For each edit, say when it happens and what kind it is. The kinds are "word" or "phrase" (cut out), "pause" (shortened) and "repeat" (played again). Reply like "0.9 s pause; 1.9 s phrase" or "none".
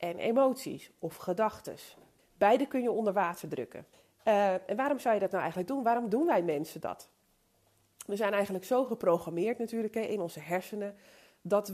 2.2 s pause; 3.9 s pause